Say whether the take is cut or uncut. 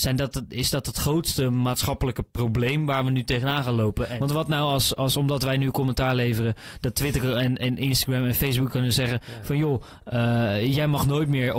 uncut